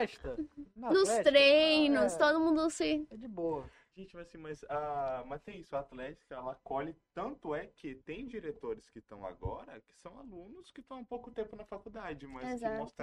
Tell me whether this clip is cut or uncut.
uncut